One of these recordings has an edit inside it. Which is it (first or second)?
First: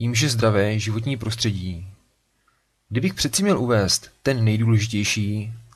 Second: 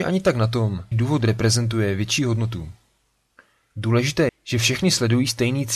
second